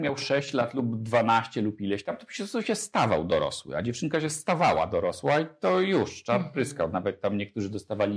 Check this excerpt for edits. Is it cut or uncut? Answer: uncut